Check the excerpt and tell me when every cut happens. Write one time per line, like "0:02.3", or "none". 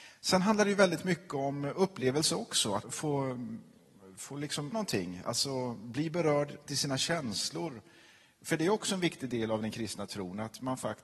0:02.8
0:04.7
0:06.7